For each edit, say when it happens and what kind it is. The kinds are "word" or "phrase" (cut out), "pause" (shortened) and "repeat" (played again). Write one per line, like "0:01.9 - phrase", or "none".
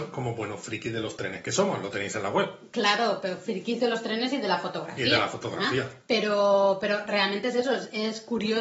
none

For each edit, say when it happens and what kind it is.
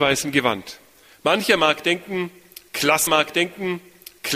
0:03.1 - repeat

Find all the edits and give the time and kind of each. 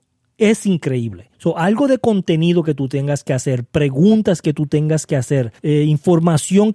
0:01.3 - pause
0:05.6 - pause

